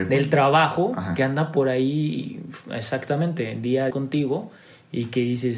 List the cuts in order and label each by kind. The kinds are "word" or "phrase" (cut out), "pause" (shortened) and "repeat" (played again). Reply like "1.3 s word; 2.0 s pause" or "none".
3.9 s word